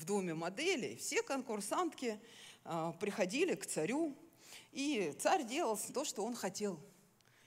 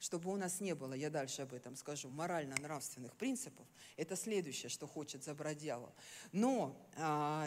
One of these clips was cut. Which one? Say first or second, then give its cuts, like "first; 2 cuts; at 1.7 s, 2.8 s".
first; 1 cut; at 5.9 s